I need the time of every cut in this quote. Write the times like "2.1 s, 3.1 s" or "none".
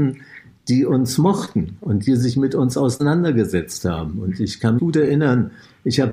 4.8 s